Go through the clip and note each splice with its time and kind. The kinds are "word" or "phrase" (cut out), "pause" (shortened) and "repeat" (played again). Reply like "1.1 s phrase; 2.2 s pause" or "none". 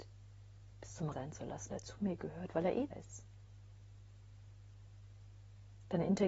1.1 s phrase; 1.7 s phrase; 2.9 s word